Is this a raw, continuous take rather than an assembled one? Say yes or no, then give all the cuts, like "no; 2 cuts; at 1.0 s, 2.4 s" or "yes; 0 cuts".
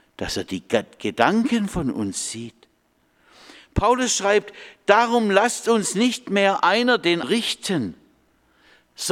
no; 1 cut; at 7.2 s